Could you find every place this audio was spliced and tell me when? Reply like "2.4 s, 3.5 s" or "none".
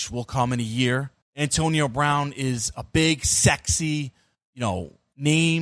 1.2 s